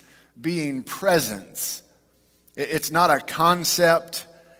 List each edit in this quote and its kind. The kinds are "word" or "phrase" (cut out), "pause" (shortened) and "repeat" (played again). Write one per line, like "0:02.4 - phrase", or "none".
none